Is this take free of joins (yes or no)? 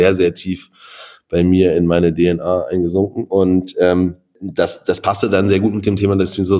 yes